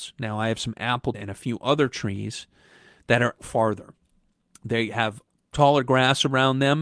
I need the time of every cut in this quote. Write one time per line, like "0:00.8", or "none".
0:01.1
0:03.4
0:05.5